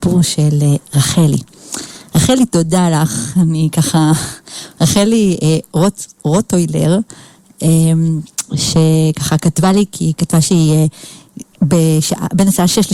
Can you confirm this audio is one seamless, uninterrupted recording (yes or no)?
yes